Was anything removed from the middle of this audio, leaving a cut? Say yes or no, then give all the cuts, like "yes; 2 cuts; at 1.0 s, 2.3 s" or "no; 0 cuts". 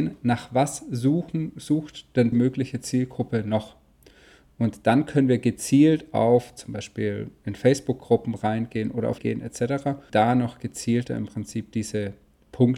yes; 3 cuts; at 2.3 s, 9.2 s, 10.1 s